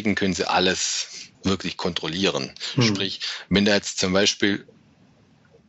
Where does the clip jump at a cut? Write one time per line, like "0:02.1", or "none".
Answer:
0:01.3

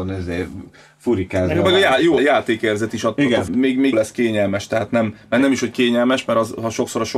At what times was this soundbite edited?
0:02.2
0:03.5
0:03.9

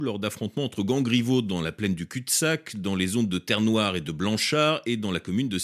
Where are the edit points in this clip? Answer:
none

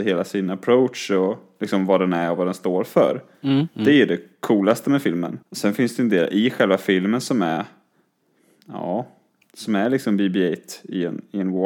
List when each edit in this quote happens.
0:05.4
0:09.4

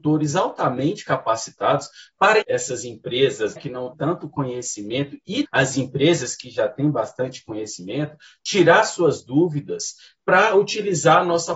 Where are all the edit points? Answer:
0:02.4
0:03.6
0:03.9
0:05.4

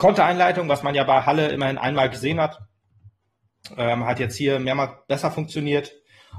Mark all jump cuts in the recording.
none

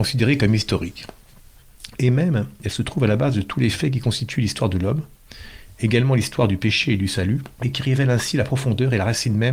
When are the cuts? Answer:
0:07.5

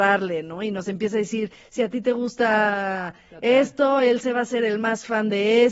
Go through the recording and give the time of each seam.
none

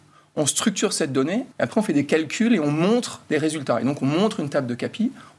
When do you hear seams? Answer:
0:01.5

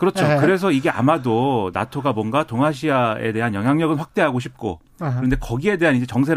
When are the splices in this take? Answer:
none

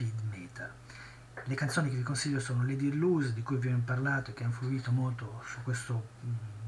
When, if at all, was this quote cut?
none

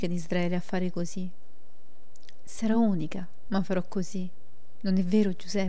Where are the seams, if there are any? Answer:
none

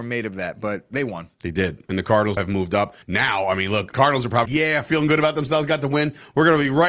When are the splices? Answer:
0:01.3
0:02.4
0:03.0
0:03.9
0:04.5

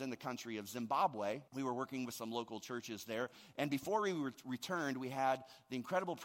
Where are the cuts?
0:01.5

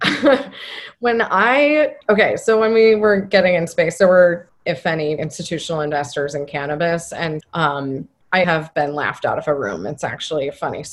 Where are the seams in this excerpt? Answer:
0:02.0
0:03.7
0:04.5
0:05.2
0:07.4
0:08.4

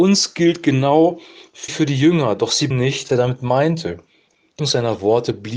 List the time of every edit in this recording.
0:01.7
0:02.7
0:03.1
0:04.6

